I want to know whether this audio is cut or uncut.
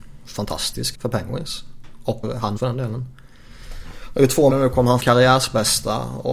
cut